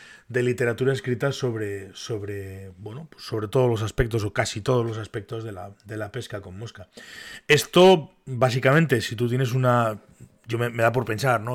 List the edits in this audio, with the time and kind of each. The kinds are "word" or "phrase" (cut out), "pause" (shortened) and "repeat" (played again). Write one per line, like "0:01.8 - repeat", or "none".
none